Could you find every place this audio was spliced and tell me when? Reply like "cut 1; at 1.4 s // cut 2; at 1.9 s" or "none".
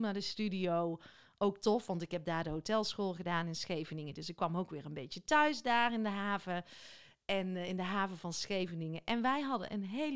none